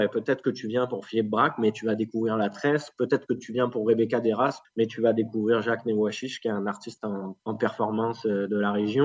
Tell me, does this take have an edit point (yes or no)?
yes